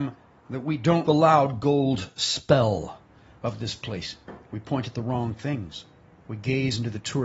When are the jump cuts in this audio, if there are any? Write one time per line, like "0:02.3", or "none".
0:01.1